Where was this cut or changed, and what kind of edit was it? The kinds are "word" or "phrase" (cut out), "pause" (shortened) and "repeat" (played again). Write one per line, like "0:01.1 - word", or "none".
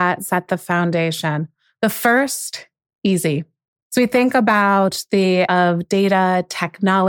0:05.4 - word